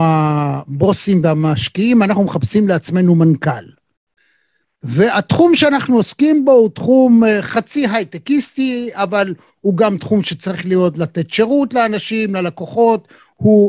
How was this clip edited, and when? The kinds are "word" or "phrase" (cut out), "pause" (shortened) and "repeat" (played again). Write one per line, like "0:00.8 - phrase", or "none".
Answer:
none